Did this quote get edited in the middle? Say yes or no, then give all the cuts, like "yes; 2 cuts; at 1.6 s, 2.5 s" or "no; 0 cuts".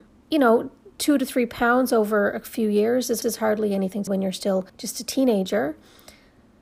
yes; 3 cuts; at 3.2 s, 4.1 s, 4.7 s